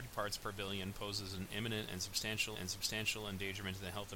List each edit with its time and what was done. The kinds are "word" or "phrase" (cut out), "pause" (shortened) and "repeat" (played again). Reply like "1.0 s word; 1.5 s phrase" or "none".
2.5 s repeat